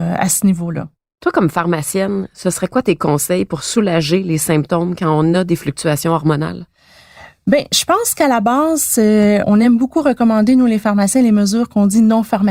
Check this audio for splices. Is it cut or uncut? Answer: uncut